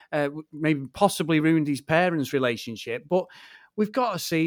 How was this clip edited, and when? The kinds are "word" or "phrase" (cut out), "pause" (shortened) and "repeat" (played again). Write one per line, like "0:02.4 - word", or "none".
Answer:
none